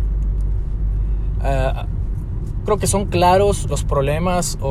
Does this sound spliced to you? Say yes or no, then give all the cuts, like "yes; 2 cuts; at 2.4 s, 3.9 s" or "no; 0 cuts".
yes; 2 cuts; at 2.7 s, 3.7 s